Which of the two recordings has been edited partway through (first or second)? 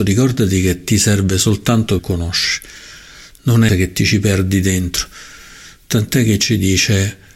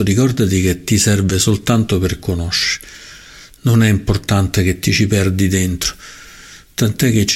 first